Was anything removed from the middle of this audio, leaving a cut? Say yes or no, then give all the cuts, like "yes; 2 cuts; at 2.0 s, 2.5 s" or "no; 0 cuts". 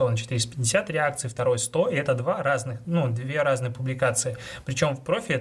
no; 0 cuts